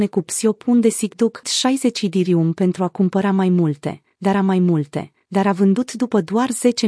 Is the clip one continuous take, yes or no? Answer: no